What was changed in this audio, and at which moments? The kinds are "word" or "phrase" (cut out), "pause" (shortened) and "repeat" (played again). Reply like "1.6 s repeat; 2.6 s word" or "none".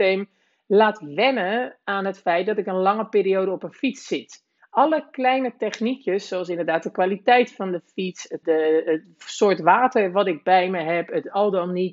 4.6 s pause; 8.4 s word

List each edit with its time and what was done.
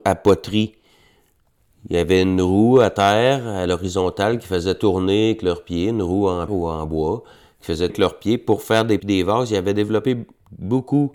6.5 s word; 7.9 s word; 9.0 s word

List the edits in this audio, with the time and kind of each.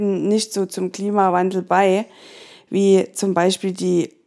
none

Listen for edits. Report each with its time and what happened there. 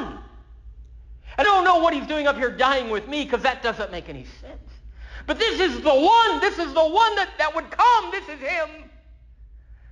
1.4 s word

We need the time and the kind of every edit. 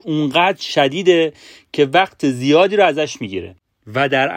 none

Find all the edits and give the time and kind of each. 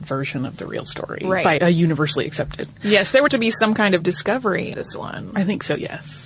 1.6 s word; 3.3 s word; 4.0 s word; 4.7 s word

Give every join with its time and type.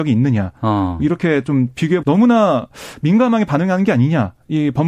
2.0 s word

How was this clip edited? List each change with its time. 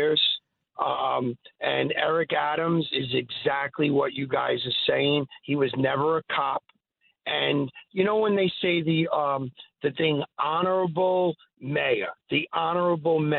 none

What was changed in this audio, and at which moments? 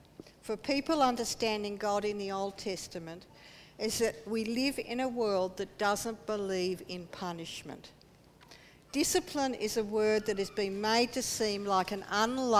none

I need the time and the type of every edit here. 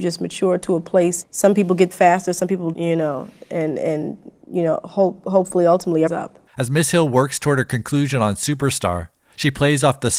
1.2 s word; 1.9 s word; 2.7 s word; 4.4 s pause; 6.1 s phrase; 6.5 s pause

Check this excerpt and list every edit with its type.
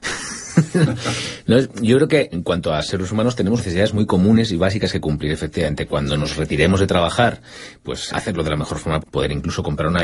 2.3 s word; 3.6 s word; 8.1 s word; 9.0 s word

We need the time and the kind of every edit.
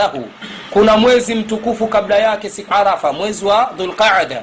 2.7 s word

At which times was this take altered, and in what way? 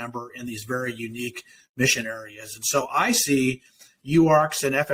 none

